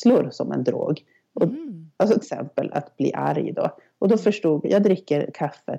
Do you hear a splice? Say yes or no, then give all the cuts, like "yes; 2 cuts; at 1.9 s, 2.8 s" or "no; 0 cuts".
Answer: yes; 2 cuts; at 2.2 s, 4.6 s